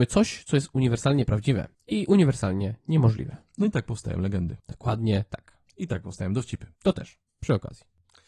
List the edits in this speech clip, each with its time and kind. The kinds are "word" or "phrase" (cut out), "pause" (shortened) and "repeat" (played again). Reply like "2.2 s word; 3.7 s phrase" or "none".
1.7 s pause; 4.6 s pause; 6.8 s pause; 7.3 s pause